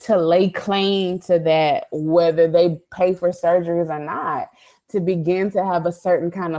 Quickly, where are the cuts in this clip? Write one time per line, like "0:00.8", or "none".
none